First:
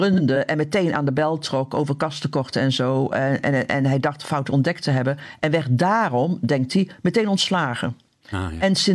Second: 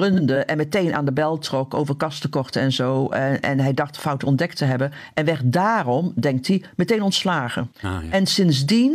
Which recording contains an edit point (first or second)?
second